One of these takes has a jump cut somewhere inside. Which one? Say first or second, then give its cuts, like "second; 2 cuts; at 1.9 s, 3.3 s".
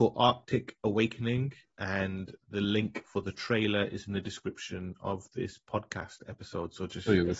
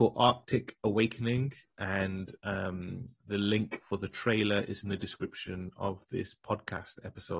first; 1 cut; at 2.4 s